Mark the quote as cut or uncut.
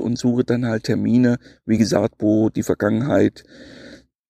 uncut